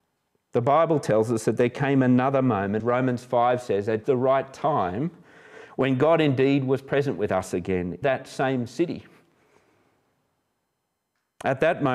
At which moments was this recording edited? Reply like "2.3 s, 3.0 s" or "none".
2.8 s, 4.0 s, 8.0 s